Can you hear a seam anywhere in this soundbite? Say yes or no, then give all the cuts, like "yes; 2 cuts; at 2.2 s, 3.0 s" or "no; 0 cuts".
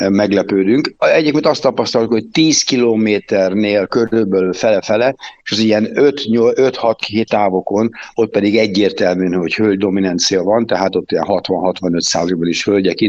yes; 1 cut; at 7.3 s